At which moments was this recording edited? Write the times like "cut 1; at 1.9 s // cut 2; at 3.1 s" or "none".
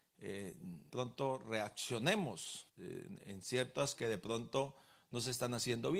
cut 1; at 0.9 s // cut 2; at 2.7 s // cut 3; at 4.0 s